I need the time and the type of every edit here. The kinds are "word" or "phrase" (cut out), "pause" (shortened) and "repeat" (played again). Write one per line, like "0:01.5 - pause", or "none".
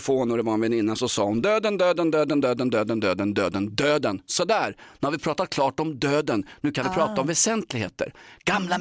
none